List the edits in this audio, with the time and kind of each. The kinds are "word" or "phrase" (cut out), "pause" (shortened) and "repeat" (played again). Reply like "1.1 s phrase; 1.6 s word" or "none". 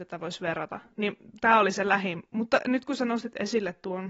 none

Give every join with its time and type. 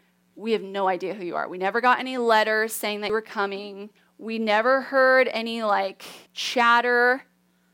4.0 s pause; 6.3 s pause

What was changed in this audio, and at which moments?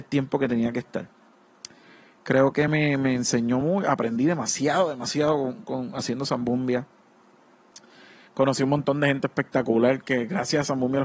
none

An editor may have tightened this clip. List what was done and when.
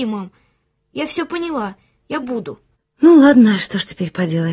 2.2 s phrase

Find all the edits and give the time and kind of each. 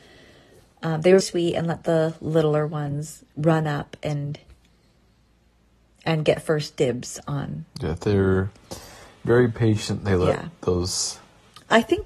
1.2 s word

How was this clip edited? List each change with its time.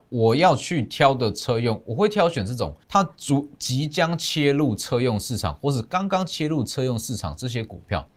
2.8 s pause

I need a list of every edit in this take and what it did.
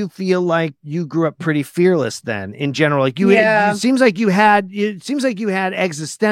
none

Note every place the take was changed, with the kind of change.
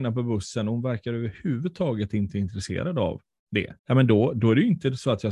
3.8 s pause

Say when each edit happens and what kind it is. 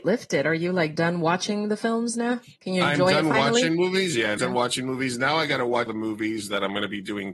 2.6 s pause; 4.4 s word; 5.9 s word

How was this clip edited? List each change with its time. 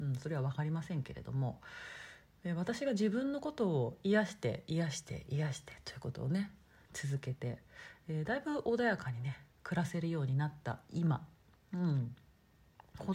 9.5 s pause

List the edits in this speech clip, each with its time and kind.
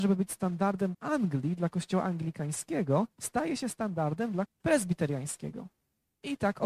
0.9 s phrase; 3.1 s pause; 4.5 s word

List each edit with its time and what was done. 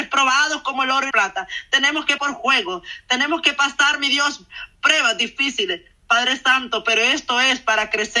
1.1 s word; 2.2 s word; 4.8 s pause

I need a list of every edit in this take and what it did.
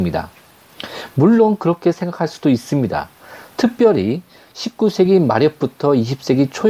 none

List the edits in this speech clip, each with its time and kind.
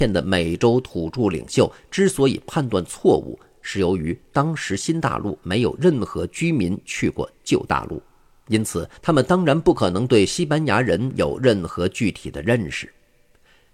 9.0 s pause

